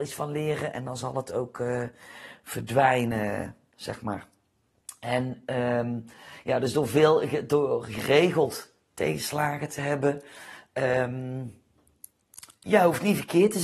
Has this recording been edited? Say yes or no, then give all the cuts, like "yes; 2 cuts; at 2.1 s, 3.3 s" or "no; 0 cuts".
no; 0 cuts